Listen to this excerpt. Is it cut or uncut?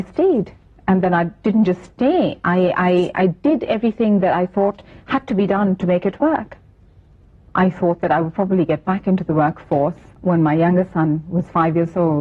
uncut